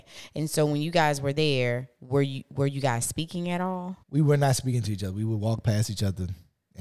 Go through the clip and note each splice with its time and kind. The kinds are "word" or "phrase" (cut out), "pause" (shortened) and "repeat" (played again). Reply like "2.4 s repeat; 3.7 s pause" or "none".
4.0 s pause